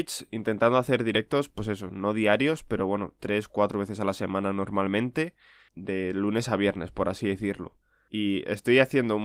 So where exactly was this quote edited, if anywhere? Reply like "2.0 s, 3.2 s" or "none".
none